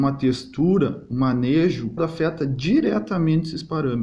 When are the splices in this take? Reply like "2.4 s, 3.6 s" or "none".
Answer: 2.0 s